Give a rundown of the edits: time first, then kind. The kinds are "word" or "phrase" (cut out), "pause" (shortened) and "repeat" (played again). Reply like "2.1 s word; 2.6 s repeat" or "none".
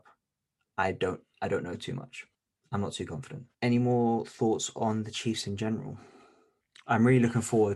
2.3 s pause; 3.5 s pause